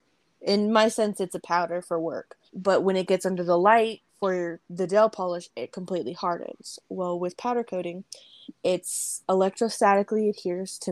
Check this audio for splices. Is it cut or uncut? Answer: cut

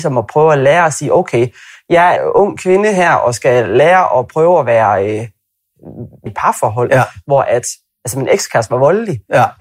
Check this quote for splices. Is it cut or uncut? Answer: cut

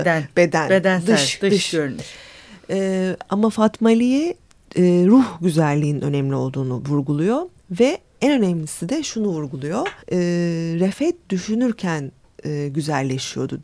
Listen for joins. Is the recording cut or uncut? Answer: cut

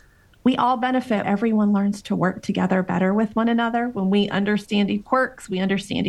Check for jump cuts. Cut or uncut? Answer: cut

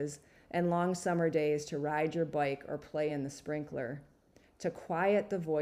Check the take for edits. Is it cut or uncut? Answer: uncut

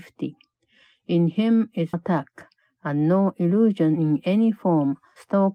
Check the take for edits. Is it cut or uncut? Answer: cut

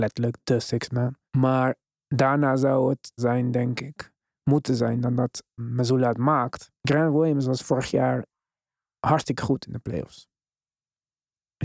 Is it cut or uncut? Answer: cut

